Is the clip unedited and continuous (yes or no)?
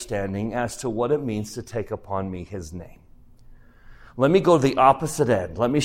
yes